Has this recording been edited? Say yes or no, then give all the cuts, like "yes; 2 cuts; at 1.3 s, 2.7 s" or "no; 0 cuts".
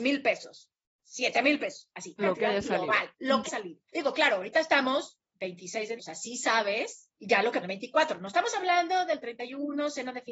yes; 7 cuts; at 2.2 s, 3.1 s, 3.5 s, 3.9 s, 6.0 s, 7.1 s, 7.6 s